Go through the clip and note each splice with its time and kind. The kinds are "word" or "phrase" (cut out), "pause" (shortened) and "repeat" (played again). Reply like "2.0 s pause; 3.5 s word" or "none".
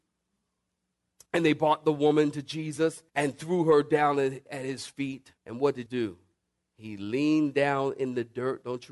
3.1 s pause; 4.5 s word; 5.4 s pause; 5.9 s word